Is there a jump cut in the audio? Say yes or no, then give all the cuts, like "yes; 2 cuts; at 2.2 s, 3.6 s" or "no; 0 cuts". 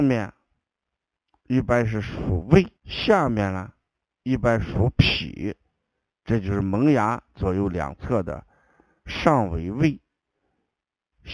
yes; 2 cuts; at 2.8 s, 4.1 s